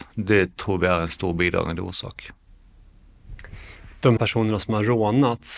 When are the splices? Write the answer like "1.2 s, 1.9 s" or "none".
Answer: 4.2 s